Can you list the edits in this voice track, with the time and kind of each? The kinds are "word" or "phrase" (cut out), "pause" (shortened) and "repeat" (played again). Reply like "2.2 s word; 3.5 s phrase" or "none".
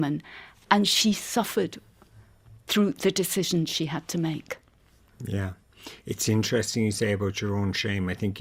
none